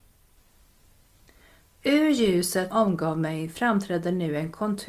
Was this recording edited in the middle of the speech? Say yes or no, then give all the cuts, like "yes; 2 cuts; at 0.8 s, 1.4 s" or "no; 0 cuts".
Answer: yes; 1 cut; at 2.7 s